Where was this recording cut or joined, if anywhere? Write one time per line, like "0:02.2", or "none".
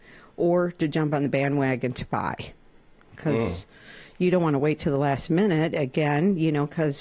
none